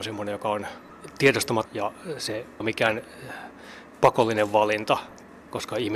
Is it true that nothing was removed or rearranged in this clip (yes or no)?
no